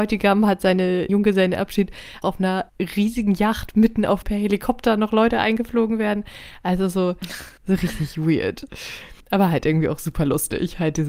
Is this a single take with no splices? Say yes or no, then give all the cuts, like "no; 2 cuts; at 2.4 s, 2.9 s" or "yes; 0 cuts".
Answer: no; 6 cuts; at 1.1 s, 2.2 s, 2.7 s, 4.2 s, 7.6 s, 9.2 s